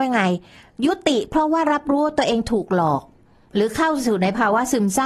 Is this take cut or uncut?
uncut